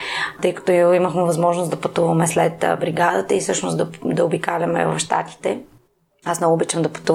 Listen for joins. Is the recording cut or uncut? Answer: uncut